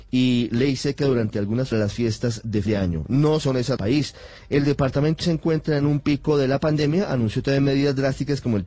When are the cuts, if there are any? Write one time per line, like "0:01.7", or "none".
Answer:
0:01.7
0:02.7
0:03.4
0:03.8
0:05.2